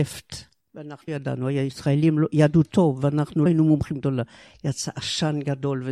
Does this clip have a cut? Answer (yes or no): yes